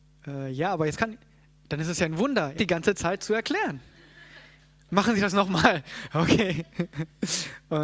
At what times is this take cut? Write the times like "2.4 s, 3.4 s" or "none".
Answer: 2.6 s